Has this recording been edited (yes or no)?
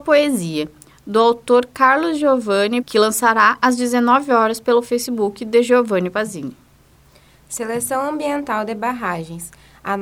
yes